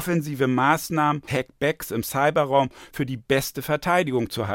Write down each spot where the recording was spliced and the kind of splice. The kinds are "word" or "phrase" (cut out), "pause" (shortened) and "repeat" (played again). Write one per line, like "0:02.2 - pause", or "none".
0:01.3 - word